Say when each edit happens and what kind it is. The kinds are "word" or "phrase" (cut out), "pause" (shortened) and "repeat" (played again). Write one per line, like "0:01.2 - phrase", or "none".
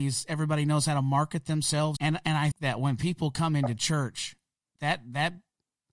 0:02.0 - word
0:02.5 - word
0:04.8 - word